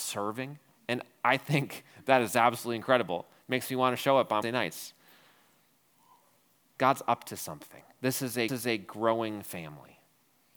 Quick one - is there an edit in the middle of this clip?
yes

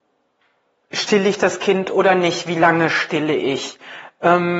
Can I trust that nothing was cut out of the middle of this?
yes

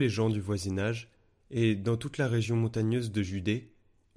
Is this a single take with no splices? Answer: yes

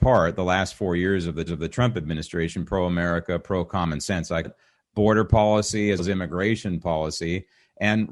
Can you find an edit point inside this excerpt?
yes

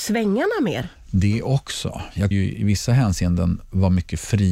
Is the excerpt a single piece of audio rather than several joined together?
no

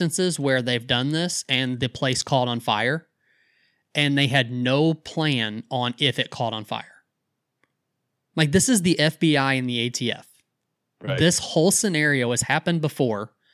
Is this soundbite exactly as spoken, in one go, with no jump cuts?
yes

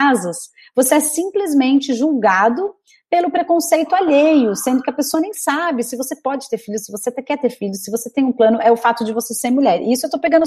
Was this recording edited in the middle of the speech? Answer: no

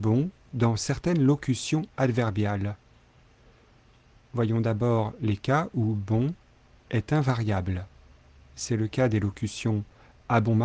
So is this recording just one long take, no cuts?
yes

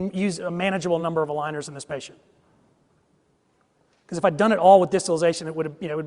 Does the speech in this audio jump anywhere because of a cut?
no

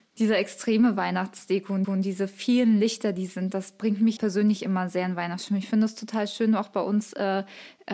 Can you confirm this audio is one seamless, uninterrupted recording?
no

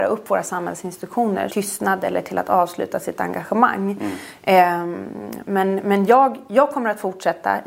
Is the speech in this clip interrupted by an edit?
yes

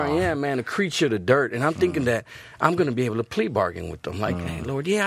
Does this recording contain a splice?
no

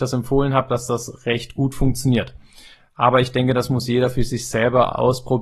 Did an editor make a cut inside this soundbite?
no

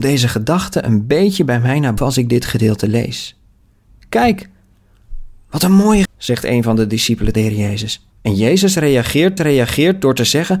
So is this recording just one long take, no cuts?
no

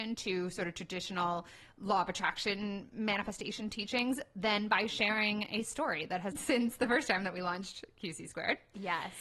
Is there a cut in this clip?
yes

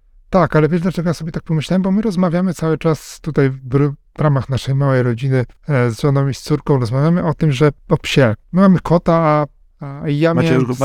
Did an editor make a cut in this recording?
yes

